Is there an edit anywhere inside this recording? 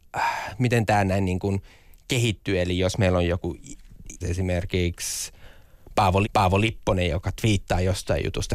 yes; 2 cuts; at 4.2 s, 6.2 s

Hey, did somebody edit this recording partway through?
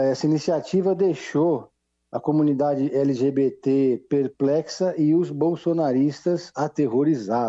no; 0 cuts

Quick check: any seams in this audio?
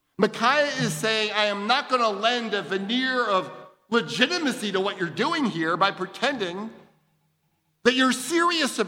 no; 0 cuts

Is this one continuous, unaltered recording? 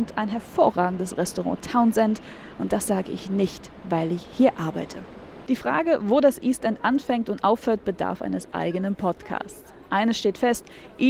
yes; 0 cuts

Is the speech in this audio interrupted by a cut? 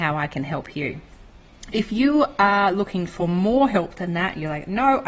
no; 0 cuts

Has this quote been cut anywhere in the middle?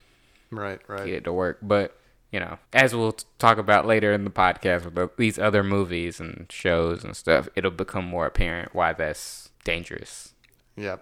yes; 3 cuts; at 2.0 s, 2.7 s, 9.5 s

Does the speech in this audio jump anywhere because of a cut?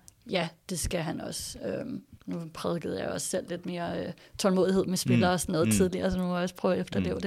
yes; 1 cut; at 2.2 s

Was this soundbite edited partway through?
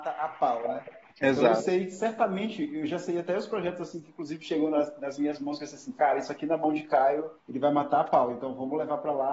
yes; 1 cut; at 7.4 s

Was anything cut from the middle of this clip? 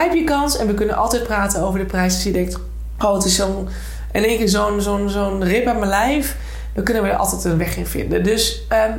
no; 0 cuts

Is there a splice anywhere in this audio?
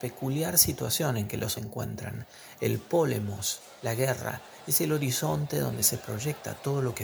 yes; 1 cut; at 1.5 s

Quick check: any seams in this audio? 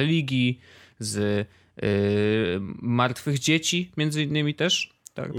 no; 0 cuts

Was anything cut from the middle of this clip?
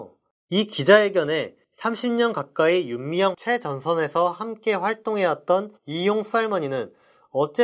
yes; 3 cuts; at 1.6 s, 3.3 s, 5.8 s

